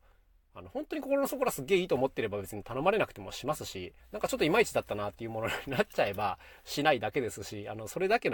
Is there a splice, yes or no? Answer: yes